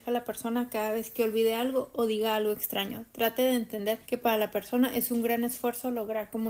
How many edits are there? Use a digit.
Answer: 1